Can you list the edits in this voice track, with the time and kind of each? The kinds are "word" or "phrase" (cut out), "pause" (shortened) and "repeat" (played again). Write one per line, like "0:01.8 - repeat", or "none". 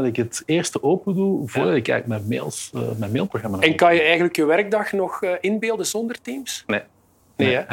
none